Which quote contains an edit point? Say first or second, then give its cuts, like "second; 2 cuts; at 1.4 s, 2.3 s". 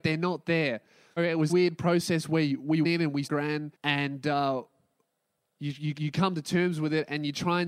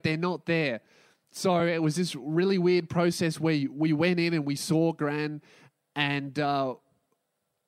first; 6 cuts; at 1.2 s, 1.5 s, 2.8 s, 3.2 s, 3.7 s, 5.9 s